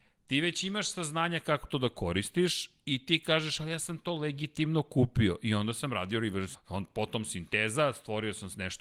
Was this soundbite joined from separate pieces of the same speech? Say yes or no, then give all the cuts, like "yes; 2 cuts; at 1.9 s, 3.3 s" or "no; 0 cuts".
yes; 1 cut; at 6.5 s